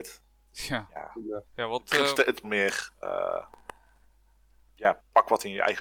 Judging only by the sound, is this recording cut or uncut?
cut